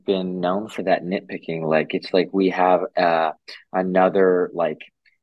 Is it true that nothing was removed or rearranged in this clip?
yes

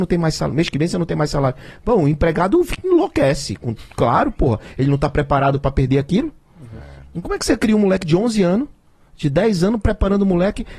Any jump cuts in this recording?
no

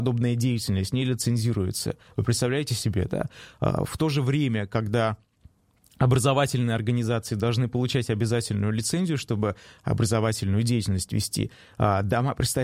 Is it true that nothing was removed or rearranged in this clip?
yes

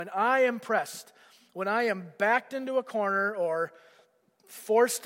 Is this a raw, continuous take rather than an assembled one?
yes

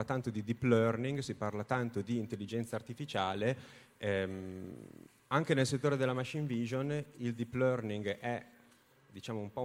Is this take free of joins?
yes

